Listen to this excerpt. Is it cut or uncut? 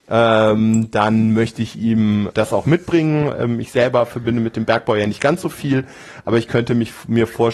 cut